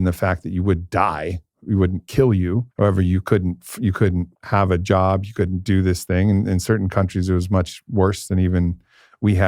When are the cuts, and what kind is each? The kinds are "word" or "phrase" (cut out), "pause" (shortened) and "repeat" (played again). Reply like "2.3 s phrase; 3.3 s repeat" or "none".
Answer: 2.7 s pause; 4.3 s pause